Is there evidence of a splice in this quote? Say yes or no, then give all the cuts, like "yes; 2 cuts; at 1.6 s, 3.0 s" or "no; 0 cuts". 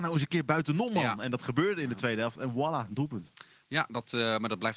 no; 0 cuts